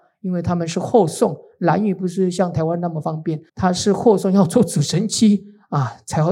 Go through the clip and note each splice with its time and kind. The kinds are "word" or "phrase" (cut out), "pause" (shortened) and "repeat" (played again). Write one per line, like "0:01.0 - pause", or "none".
0:03.5 - pause